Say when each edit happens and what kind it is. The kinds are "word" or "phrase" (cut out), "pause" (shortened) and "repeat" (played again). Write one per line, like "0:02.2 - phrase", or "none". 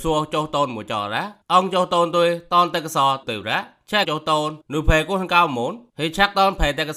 0:01.4 - pause
0:03.2 - word
0:04.0 - phrase
0:04.6 - pause